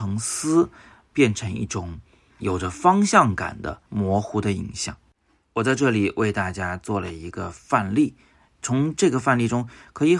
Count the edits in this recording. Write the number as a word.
two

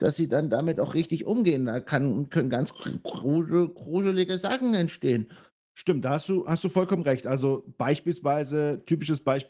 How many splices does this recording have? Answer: zero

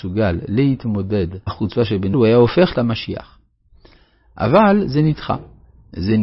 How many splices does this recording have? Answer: three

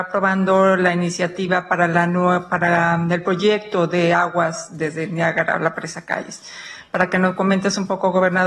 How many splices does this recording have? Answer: zero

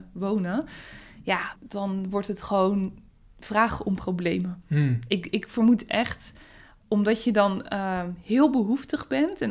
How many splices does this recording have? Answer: one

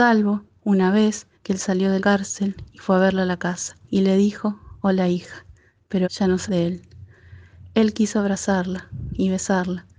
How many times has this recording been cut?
five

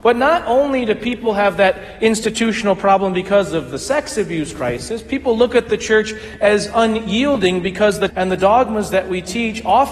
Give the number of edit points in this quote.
one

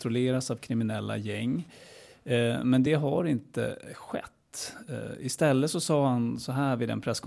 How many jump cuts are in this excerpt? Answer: zero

